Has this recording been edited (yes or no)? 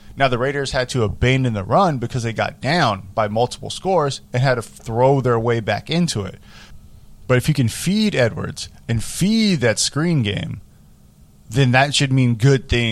no